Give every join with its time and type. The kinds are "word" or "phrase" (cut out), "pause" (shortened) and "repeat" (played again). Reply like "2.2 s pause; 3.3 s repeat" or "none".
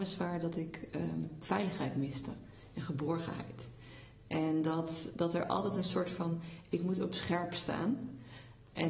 none